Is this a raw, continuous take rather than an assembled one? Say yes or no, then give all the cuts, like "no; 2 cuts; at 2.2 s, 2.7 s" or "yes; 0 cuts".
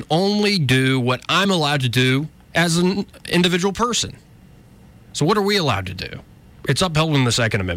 yes; 0 cuts